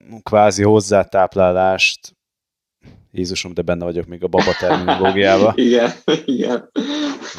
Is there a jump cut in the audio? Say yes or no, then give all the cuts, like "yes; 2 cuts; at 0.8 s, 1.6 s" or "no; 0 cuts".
no; 0 cuts